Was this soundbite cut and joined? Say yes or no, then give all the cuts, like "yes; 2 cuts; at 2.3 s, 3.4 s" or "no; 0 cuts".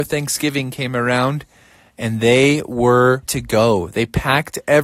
yes; 1 cut; at 3.3 s